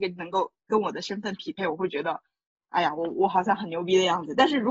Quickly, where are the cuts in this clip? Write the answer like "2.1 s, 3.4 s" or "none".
none